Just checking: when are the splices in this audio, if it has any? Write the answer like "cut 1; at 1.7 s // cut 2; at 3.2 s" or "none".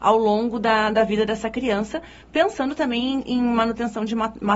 none